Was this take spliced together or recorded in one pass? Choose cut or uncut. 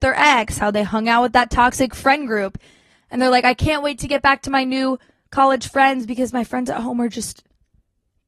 uncut